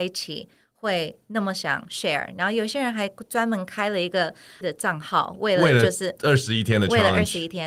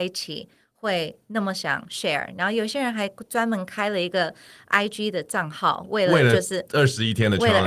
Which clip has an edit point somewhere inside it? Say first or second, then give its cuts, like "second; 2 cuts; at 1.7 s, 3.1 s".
first; 1 cut; at 4.6 s